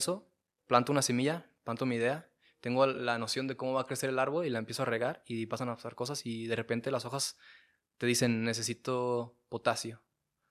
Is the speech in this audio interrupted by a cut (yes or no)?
no